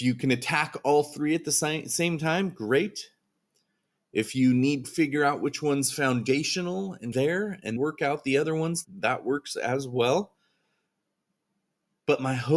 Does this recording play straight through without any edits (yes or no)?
no